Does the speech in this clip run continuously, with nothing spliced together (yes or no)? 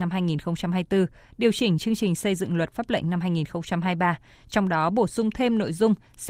yes